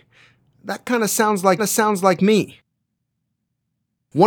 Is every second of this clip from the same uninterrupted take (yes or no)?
no